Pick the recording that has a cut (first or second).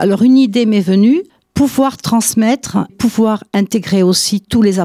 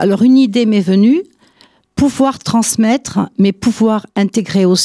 first